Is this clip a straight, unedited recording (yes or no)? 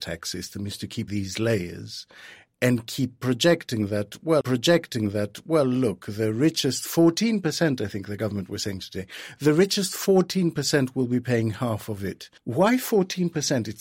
no